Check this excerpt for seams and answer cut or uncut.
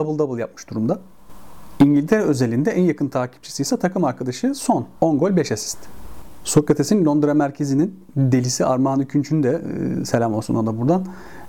cut